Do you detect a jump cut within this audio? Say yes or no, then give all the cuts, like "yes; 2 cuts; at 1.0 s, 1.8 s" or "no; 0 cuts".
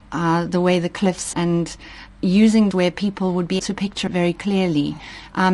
yes; 4 cuts; at 1.3 s, 2.7 s, 3.6 s, 4.1 s